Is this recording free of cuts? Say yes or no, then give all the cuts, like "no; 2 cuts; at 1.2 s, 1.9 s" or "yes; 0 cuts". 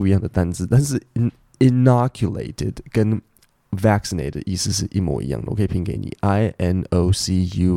yes; 0 cuts